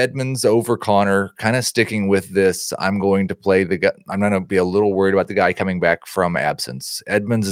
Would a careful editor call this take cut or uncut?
uncut